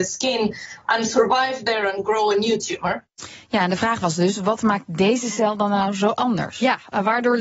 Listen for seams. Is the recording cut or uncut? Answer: uncut